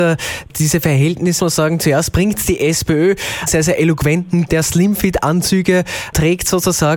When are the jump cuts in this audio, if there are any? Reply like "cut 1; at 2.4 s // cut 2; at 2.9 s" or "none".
cut 1; at 1.4 s // cut 2; at 3.5 s // cut 3; at 4.5 s